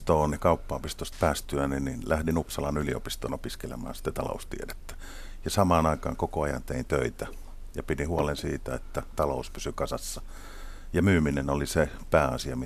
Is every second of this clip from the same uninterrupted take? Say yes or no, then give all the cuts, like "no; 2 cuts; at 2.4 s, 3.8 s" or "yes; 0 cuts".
no; 1 cut; at 1.1 s